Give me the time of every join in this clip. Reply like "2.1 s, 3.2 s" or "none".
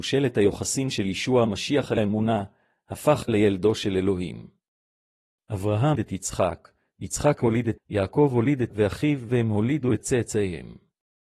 2.0 s, 3.3 s, 6.0 s, 7.8 s, 8.7 s

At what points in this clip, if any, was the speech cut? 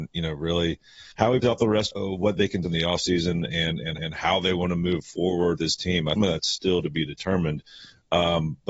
1.1 s, 1.4 s, 1.9 s, 2.6 s, 4.0 s, 5.6 s, 6.2 s

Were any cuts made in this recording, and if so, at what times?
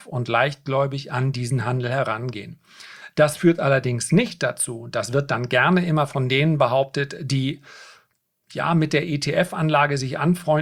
none

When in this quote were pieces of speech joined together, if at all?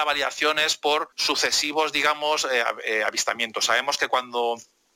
1.1 s

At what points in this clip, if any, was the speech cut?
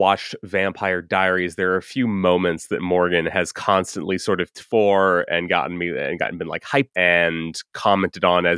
4.5 s, 6.9 s

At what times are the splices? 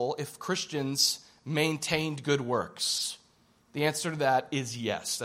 none

